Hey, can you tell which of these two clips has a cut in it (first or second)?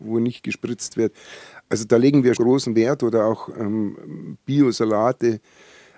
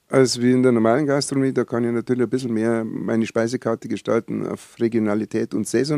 first